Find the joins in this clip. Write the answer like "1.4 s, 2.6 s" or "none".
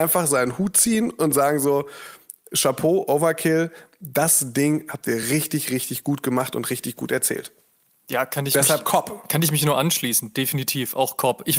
none